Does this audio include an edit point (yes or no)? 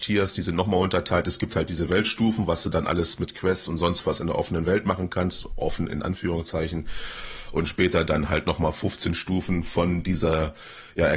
no